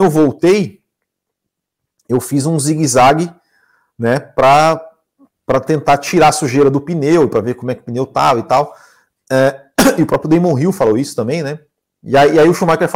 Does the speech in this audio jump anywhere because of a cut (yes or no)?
no